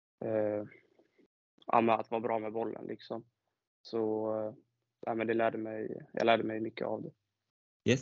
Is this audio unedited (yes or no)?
yes